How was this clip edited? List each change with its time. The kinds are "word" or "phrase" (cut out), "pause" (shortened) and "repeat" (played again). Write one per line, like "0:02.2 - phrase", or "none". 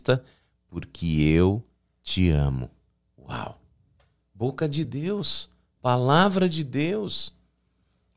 none

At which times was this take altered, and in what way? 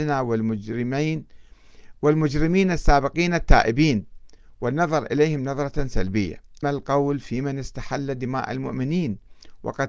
0:06.6 - phrase

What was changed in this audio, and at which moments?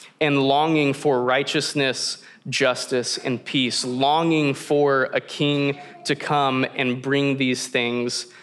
none

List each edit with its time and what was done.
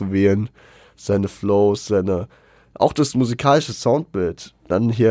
none

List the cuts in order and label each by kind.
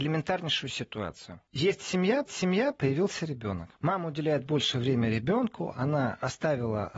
0:01.5 - pause
0:02.3 - repeat
0:03.8 - pause

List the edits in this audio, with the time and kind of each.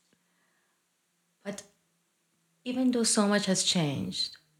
none

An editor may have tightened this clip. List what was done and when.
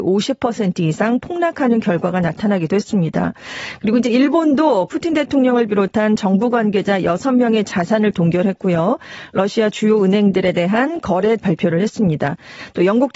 0:11.4 - phrase

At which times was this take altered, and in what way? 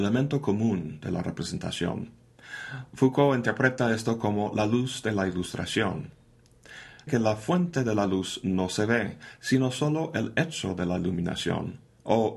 0:07.1 - word

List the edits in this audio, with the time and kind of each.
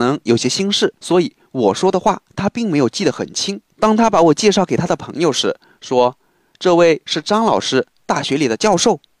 0:01.0 - pause
0:03.7 - pause

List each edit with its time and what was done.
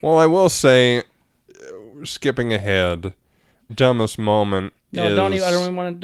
0:03.7 - word

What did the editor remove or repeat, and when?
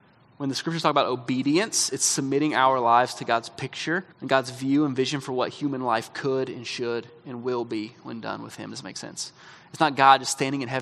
0:04.1 - pause

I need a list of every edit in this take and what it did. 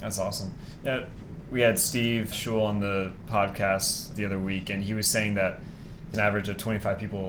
0:02.3 - word
0:04.1 - word
0:06.1 - word

